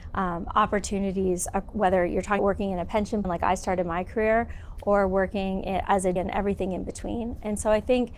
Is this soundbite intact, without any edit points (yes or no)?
no